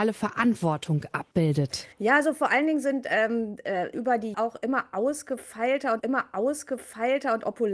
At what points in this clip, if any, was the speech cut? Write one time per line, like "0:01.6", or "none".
0:01.9
0:03.9
0:04.3
0:06.0